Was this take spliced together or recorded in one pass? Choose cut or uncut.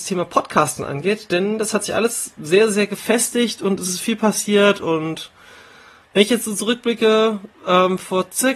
uncut